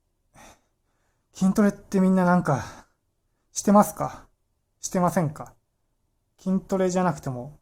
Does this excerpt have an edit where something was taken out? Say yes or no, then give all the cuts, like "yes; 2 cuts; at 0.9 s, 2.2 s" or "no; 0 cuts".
no; 0 cuts